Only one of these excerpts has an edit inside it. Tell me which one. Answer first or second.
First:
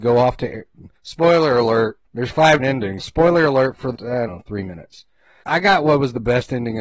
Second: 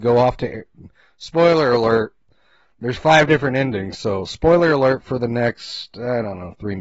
first